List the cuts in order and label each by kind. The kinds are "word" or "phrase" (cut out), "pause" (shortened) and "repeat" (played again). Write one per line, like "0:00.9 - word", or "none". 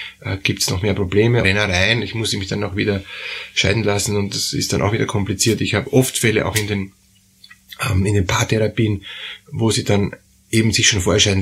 0:01.4 - phrase